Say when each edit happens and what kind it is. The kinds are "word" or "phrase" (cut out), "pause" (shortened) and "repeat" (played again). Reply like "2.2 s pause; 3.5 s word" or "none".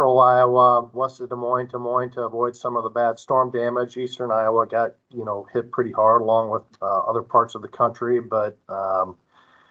0.9 s word; 1.7 s repeat; 8.6 s pause